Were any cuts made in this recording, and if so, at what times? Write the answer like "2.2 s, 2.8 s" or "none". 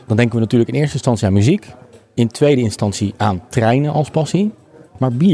none